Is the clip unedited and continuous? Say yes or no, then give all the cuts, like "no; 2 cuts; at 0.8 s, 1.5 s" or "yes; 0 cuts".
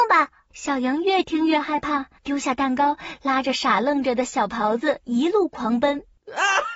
no; 1 cut; at 2.2 s